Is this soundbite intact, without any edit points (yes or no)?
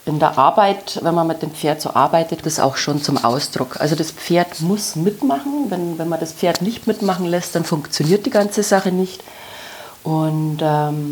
no